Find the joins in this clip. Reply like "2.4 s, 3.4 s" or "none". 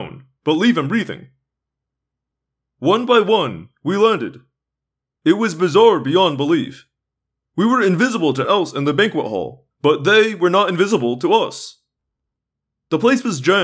8.4 s, 9.7 s